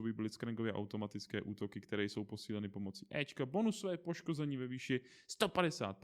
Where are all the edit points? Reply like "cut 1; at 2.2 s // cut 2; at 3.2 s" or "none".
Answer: none

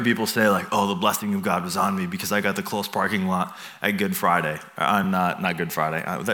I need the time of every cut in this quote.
none

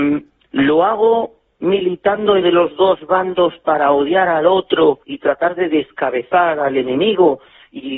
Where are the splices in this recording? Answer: cut 1; at 1.5 s // cut 2; at 2.4 s // cut 3; at 5.0 s

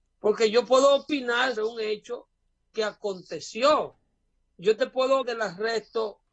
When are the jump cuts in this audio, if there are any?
cut 1; at 1.6 s // cut 2; at 5.2 s

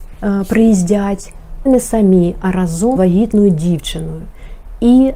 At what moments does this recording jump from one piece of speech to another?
cut 1; at 1.7 s // cut 2; at 3.0 s

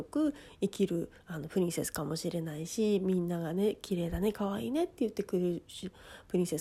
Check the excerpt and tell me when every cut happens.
cut 1; at 1.2 s

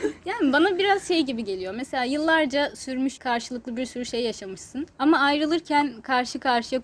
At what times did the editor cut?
cut 1; at 3.2 s // cut 2; at 4.9 s

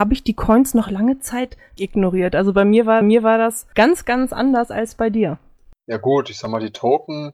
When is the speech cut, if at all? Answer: cut 1; at 1.8 s // cut 2; at 3.0 s

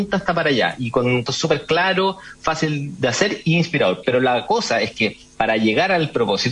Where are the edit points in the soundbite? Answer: cut 1; at 1.3 s

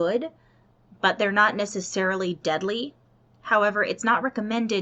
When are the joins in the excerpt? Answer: none

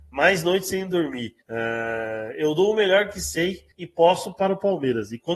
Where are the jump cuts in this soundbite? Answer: cut 1; at 1.4 s // cut 2; at 3.7 s

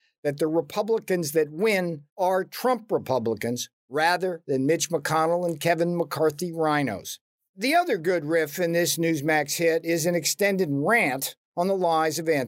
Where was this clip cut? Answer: cut 1; at 2.1 s // cut 2; at 7.4 s // cut 3; at 11.4 s

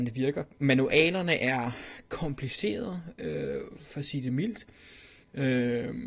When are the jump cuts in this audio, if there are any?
none

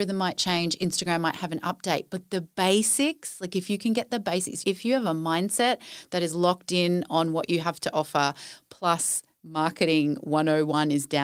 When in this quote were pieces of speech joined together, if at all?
none

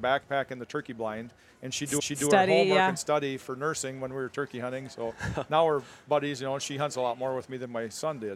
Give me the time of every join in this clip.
cut 1; at 2.0 s

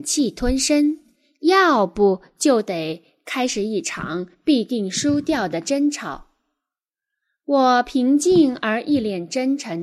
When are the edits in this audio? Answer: none

